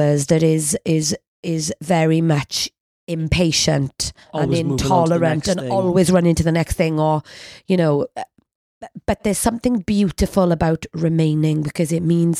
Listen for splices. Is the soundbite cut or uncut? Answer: uncut